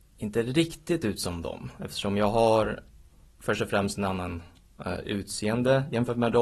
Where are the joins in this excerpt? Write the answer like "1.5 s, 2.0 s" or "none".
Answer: none